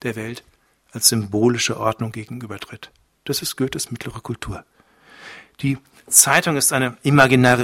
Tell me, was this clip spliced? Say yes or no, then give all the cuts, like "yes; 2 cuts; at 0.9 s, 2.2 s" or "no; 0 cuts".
no; 0 cuts